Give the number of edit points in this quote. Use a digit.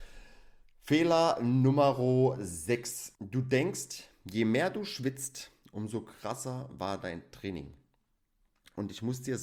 1